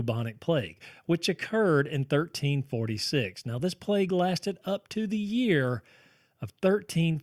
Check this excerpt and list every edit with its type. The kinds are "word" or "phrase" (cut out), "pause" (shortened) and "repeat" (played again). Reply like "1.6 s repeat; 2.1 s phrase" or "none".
none